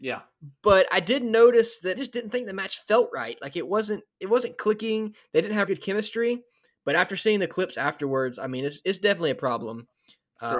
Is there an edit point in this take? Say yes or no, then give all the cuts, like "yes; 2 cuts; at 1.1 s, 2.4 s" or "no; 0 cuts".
yes; 3 cuts; at 1.9 s, 4.1 s, 5.7 s